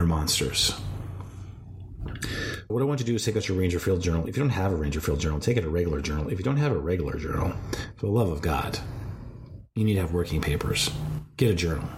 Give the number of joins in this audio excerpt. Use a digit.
1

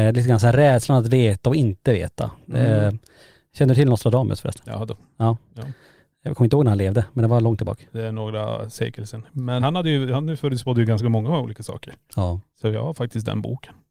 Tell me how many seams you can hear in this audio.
1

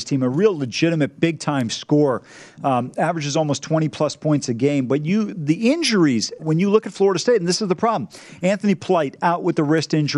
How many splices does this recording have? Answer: 1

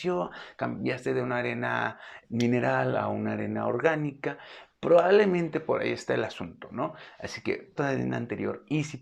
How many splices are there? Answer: 2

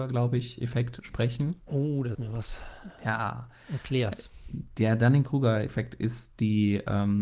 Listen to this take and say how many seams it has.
1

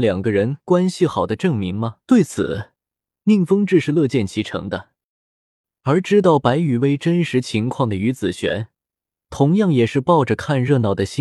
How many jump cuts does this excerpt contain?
1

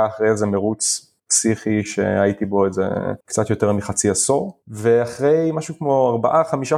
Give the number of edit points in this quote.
3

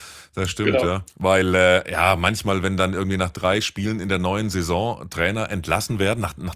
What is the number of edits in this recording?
1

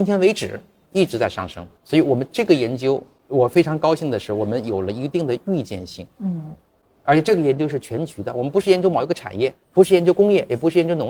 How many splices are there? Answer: 2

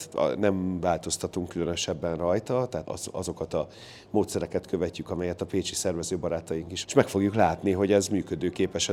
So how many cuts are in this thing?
2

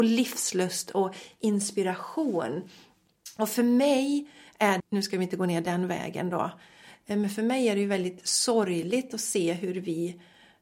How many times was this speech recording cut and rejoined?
1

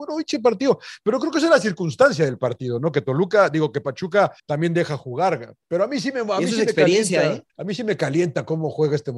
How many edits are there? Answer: 3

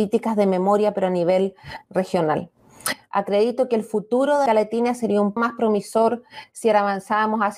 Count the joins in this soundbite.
2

